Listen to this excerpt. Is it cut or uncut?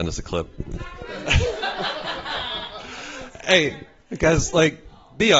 uncut